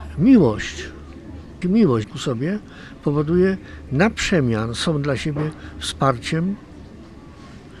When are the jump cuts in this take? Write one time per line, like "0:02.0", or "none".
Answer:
0:01.6
0:02.0
0:03.9